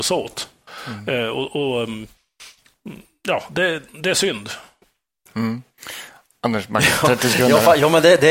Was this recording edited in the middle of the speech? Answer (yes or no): no